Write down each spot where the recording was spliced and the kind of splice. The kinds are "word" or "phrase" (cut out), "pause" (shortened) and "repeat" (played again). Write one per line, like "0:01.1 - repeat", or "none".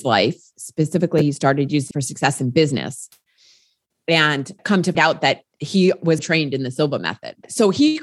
0:01.9 - word
0:04.9 - word
0:05.5 - word
0:06.2 - word